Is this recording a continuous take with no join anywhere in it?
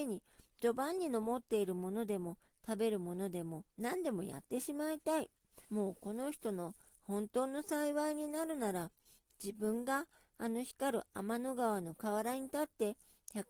no; 2 cuts; at 3.7 s, 5.6 s

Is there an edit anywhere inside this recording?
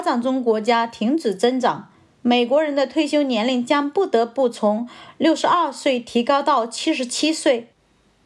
no; 0 cuts

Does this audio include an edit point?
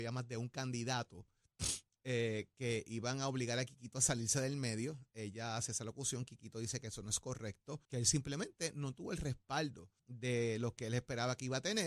yes; 2 cuts; at 7.8 s, 10.0 s

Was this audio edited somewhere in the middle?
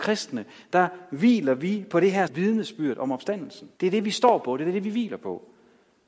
yes; 2 cuts; at 2.3 s, 3.8 s

